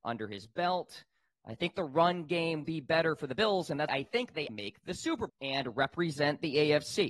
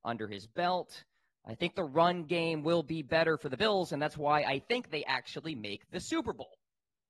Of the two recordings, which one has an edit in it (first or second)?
first